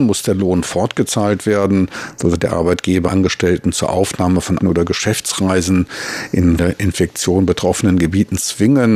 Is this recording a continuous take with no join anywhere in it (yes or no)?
no